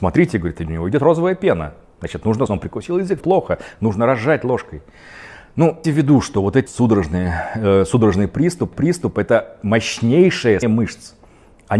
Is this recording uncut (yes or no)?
no